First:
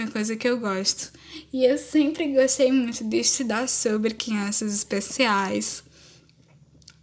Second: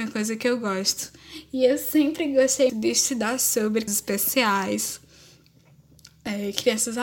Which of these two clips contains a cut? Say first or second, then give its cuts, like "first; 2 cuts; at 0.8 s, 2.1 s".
second; 2 cuts; at 2.7 s, 3.9 s